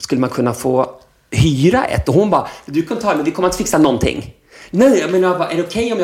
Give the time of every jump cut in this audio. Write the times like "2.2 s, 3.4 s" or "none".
none